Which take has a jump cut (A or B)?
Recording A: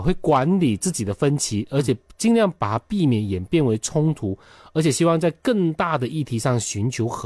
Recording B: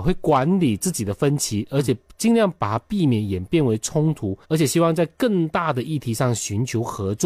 B